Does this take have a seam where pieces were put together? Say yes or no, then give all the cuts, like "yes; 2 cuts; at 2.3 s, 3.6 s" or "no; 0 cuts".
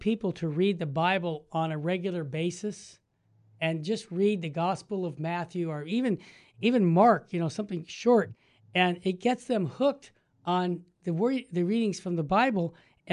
no; 0 cuts